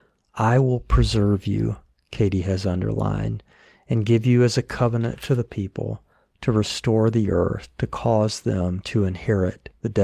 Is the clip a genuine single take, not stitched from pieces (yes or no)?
yes